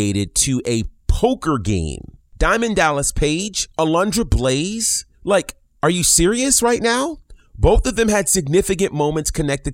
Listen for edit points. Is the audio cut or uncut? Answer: cut